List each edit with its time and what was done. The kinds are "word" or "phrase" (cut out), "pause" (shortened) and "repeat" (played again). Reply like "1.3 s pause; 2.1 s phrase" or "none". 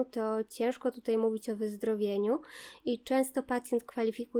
none